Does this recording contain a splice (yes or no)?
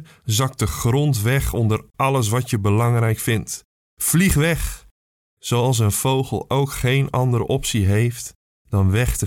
no